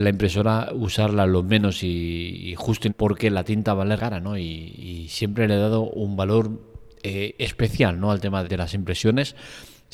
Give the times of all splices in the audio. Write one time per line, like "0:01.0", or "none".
0:02.9
0:04.0
0:08.4